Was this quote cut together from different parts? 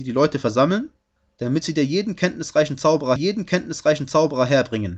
yes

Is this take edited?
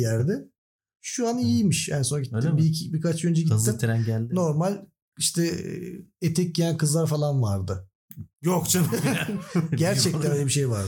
no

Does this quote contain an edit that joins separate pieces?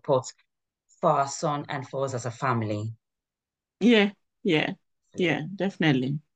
no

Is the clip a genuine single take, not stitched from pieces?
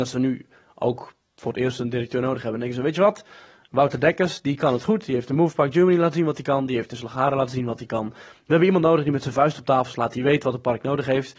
yes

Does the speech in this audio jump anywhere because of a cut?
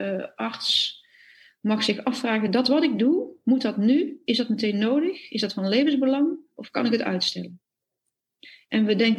no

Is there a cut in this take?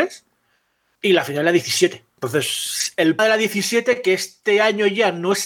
yes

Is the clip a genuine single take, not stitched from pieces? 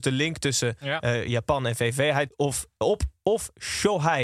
no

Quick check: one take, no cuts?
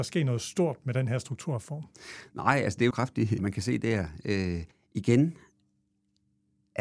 no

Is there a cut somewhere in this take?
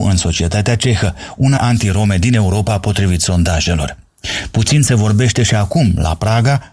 yes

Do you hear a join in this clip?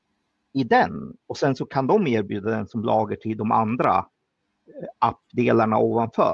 no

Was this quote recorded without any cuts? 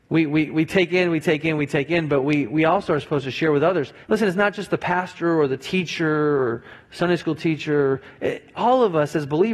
no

